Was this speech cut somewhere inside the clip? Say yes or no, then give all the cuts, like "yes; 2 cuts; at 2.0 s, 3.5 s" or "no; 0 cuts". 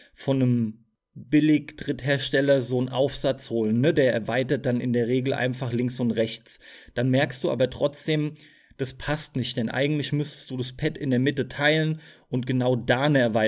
no; 0 cuts